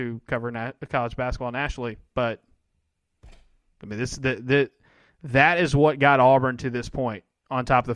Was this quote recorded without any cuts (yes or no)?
yes